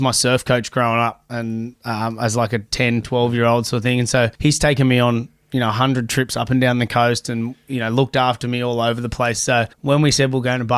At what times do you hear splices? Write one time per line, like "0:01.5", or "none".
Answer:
0:04.4
0:09.7